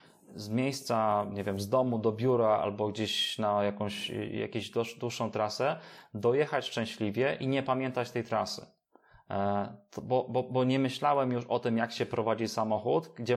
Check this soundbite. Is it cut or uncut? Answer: uncut